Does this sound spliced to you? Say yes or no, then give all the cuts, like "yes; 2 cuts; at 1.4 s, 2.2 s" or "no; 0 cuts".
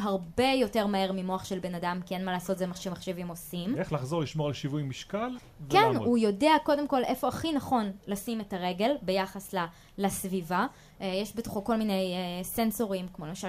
no; 0 cuts